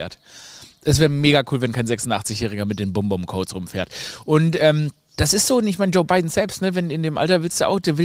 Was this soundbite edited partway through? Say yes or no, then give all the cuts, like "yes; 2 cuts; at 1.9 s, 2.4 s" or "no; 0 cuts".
no; 0 cuts